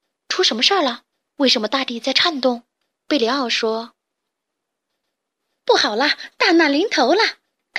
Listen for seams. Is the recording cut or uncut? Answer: uncut